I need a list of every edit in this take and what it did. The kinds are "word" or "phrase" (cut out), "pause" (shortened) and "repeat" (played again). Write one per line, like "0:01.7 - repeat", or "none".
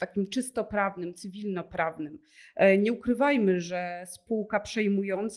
none